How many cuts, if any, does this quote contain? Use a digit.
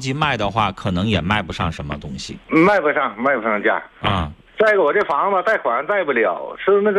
1